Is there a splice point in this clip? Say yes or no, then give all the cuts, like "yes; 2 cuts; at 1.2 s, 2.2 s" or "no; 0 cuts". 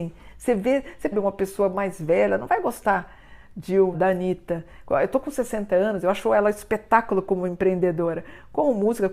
yes; 2 cuts; at 1.1 s, 3.9 s